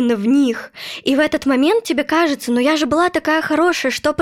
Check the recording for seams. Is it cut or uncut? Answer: uncut